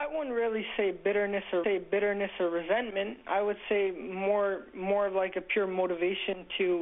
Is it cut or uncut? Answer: cut